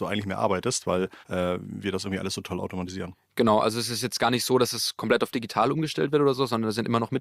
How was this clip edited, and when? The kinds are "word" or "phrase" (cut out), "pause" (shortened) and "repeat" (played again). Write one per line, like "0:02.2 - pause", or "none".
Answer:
0:01.2 - pause